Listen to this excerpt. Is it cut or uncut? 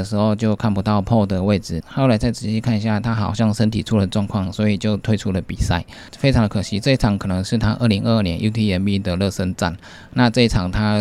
uncut